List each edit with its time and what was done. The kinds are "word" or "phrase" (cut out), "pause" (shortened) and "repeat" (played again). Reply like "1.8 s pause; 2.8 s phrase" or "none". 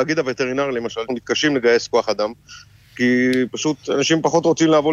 1.1 s word